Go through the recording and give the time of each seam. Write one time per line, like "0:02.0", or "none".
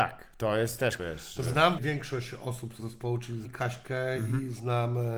0:01.0
0:01.8
0:02.8
0:03.4